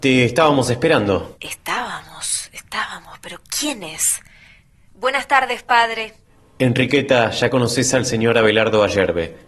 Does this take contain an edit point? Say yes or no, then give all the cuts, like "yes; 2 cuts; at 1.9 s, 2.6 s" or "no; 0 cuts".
no; 0 cuts